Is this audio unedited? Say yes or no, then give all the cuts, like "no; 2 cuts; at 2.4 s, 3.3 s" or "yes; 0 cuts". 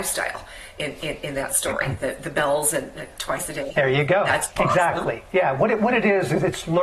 yes; 0 cuts